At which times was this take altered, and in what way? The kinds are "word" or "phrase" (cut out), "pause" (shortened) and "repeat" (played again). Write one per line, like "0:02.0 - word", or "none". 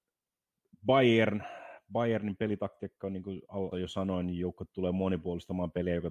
0:03.7 - word